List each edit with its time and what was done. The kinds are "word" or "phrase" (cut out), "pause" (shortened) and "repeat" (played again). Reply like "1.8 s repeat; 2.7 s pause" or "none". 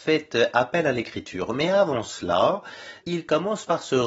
none